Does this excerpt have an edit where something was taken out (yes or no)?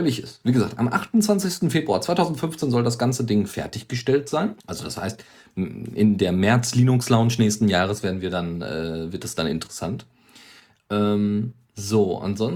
yes